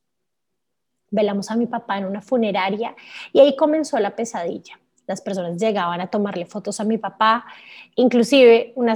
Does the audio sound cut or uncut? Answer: uncut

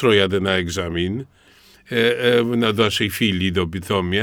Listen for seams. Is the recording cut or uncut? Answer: uncut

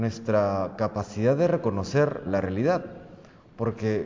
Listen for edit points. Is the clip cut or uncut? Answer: cut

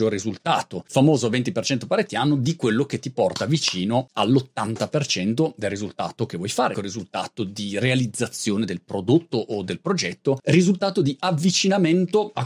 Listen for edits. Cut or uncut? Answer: cut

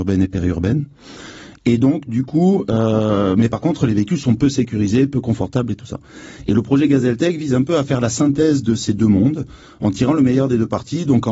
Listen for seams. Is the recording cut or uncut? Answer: uncut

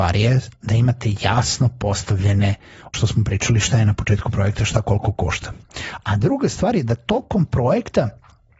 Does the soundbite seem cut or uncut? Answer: cut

